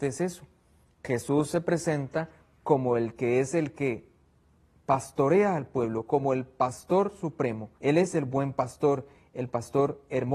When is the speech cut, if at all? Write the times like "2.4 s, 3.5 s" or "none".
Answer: 7.7 s